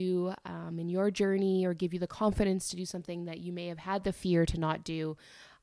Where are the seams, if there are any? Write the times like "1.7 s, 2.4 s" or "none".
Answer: none